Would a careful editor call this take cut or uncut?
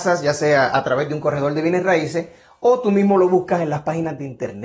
uncut